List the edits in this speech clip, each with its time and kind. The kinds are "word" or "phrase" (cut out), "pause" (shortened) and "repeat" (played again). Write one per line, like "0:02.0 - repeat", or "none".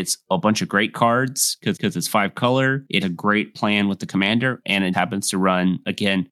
0:01.8 - repeat
0:03.0 - word
0:04.9 - word